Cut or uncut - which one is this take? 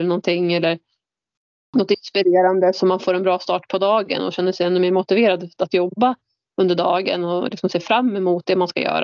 uncut